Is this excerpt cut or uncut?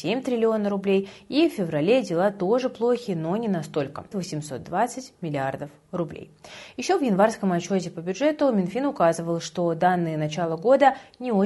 cut